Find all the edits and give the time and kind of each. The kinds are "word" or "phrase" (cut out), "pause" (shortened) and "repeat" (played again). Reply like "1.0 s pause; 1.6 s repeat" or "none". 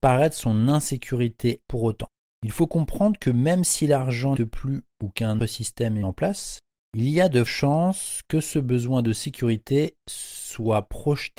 1.7 s word; 4.4 s word; 5.4 s word; 6.0 s word; 7.5 s word